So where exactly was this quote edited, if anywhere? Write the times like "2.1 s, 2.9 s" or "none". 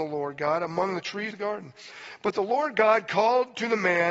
1.3 s